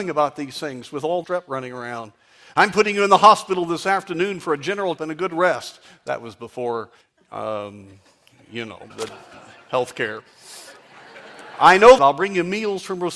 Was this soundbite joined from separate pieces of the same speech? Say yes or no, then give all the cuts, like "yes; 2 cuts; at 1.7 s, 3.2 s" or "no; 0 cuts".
yes; 5 cuts; at 1.2 s, 5.0 s, 7.0 s, 8.9 s, 12.0 s